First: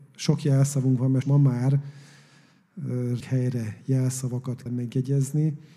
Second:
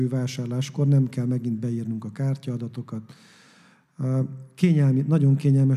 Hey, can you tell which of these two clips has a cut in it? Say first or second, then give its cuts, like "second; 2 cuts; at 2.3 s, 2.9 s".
first; 3 cuts; at 1.2 s, 3.2 s, 4.7 s